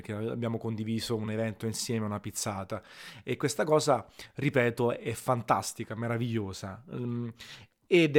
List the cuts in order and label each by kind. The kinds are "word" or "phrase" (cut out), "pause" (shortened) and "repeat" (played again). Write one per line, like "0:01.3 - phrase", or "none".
none